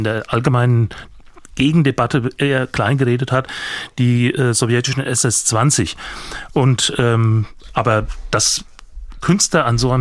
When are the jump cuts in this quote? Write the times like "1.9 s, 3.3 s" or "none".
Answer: none